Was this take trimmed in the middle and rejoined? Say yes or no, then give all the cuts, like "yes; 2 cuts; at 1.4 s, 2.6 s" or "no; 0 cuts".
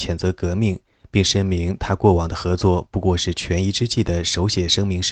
no; 0 cuts